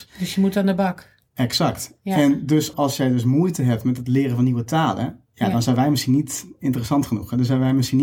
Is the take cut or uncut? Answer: cut